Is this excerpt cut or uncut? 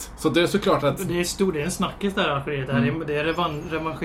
uncut